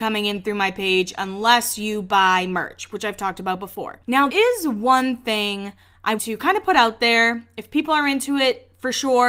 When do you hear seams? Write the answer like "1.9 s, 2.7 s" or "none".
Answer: 4.3 s, 6.2 s